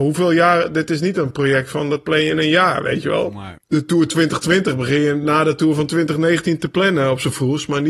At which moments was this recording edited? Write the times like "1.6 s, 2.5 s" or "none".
3.6 s